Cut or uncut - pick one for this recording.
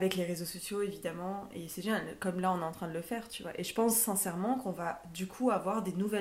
uncut